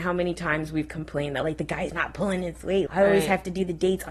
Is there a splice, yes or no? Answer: yes